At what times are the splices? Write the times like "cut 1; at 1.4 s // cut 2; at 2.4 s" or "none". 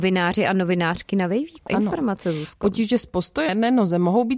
cut 1; at 1.7 s // cut 2; at 3.5 s